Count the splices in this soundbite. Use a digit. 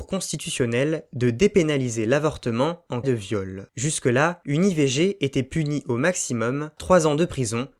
2